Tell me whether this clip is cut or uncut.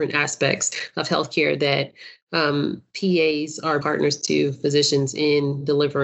cut